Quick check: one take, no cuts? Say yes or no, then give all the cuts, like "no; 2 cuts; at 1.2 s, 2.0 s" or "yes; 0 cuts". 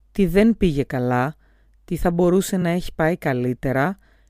yes; 0 cuts